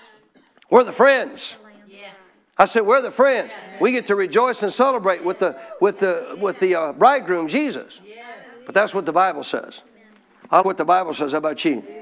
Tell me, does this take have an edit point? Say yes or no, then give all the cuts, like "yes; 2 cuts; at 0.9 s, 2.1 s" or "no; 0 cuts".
yes; 1 cut; at 10.6 s